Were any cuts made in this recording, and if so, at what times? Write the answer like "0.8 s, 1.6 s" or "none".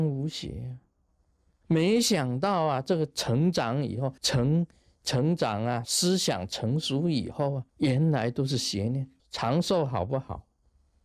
4.2 s, 7.7 s, 9.2 s